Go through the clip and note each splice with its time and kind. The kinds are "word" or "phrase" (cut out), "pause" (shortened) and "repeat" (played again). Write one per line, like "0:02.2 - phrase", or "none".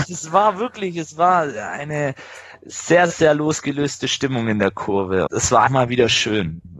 0:05.3 - word
0:05.7 - word